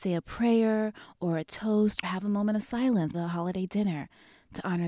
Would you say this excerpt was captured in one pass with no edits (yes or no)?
no